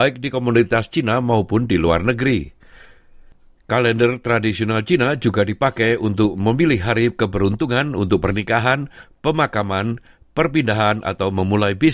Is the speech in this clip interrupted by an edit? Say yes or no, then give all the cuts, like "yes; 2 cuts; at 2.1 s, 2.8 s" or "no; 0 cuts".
no; 0 cuts